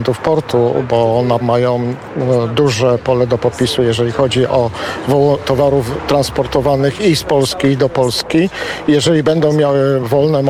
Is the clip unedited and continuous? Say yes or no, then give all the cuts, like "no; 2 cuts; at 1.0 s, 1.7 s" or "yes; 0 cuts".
no; 2 cuts; at 1.4 s, 5.4 s